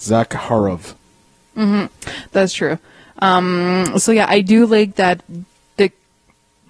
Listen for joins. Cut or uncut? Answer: uncut